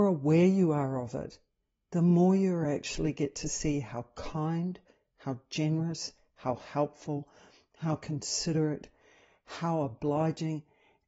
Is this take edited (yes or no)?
no